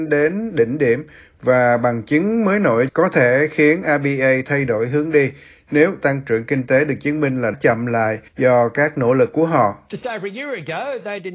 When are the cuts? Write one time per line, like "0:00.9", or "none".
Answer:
0:07.5
0:08.3